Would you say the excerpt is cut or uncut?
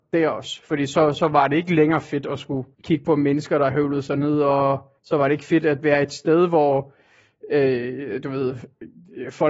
cut